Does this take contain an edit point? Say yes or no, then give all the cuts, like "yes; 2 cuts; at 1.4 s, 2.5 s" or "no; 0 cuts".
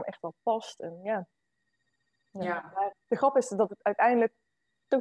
yes; 1 cut; at 2.9 s